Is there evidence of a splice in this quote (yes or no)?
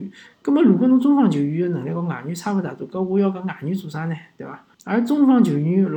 yes